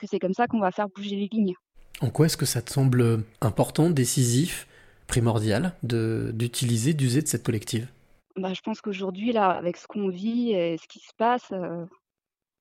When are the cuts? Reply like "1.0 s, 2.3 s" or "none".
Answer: 3.3 s, 5.8 s, 7.4 s